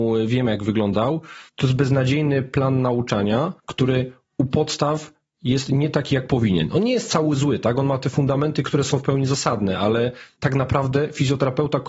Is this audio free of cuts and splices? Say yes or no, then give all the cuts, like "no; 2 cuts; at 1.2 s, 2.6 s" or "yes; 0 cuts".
no; 2 cuts; at 1.5 s, 3.6 s